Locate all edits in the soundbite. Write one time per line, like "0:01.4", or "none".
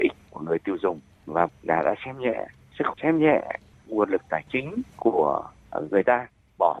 0:01.5
0:02.9